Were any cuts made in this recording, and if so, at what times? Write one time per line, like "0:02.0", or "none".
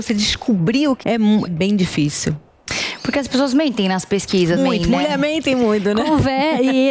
0:01.0
0:01.5
0:04.6